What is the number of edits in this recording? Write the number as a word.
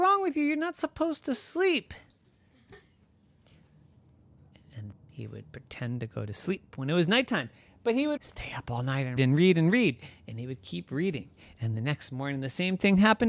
three